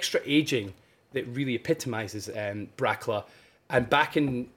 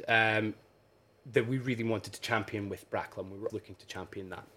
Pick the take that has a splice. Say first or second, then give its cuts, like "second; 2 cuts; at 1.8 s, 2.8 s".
second; 1 cut; at 3.5 s